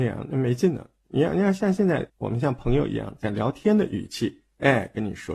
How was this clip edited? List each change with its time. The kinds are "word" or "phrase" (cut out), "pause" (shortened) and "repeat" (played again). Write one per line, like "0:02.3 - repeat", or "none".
0:02.1 - word

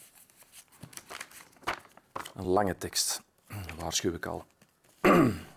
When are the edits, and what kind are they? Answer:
none

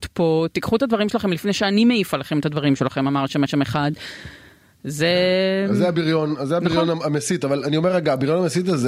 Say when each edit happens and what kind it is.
0:03.5 - repeat

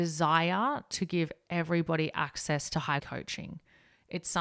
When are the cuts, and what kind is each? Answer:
0:03.0 - word

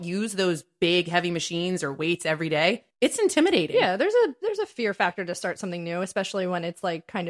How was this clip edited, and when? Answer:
0:02.9 - pause

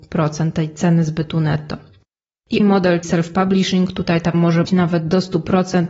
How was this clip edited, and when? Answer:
0:02.6 - word
0:03.0 - word
0:04.3 - word
0:04.6 - word

